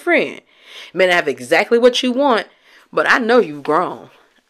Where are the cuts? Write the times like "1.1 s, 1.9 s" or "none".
none